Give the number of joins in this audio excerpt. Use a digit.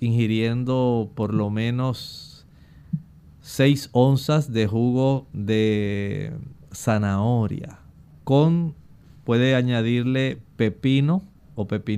0